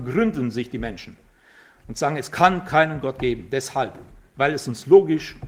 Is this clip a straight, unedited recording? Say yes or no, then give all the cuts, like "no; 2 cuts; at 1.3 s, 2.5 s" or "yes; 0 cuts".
yes; 0 cuts